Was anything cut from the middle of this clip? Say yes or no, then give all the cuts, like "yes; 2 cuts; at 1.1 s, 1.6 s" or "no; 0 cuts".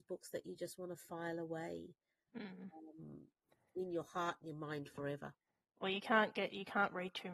no; 0 cuts